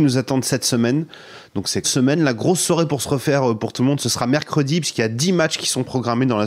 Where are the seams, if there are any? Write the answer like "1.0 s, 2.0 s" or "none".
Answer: 1.8 s